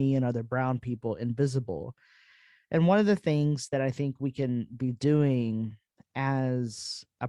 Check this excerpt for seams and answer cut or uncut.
uncut